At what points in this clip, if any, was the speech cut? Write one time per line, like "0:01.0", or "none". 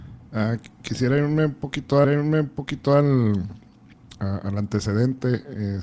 0:02.0